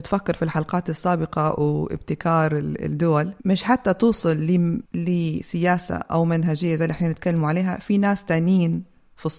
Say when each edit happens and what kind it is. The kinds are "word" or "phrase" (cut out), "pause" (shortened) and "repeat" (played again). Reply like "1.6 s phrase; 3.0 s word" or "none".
3.4 s pause; 4.9 s pause